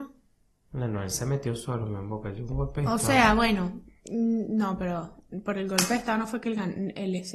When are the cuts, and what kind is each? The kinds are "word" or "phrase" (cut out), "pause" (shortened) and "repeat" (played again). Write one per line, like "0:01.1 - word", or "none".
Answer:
none